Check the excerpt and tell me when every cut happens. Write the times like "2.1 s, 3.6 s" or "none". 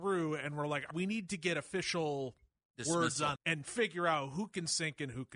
0.9 s, 3.4 s